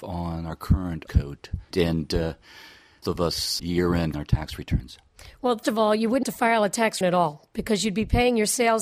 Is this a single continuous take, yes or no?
no